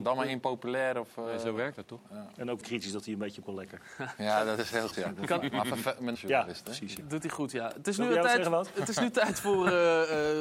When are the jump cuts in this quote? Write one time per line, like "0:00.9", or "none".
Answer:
0:02.6
0:03.4
0:04.9
0:06.1

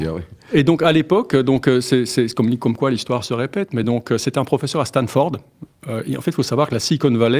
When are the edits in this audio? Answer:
none

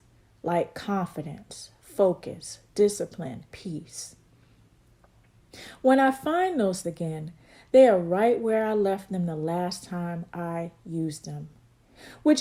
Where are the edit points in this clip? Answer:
0:03.5
0:06.8

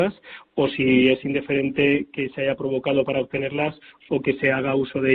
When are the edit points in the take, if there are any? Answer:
none

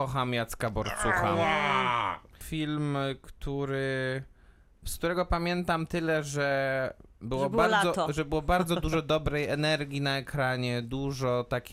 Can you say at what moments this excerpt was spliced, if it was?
none

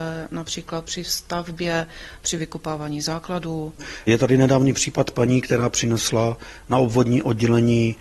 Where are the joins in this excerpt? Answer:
none

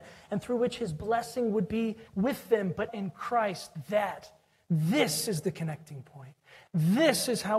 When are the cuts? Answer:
0:02.1
0:02.9

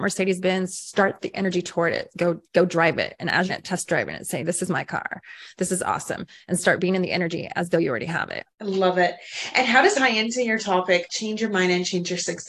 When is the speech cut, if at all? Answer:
0:02.4
0:03.5
0:08.5
0:09.9
0:11.1

